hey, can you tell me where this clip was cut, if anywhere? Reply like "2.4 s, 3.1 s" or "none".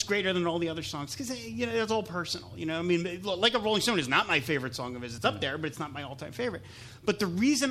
none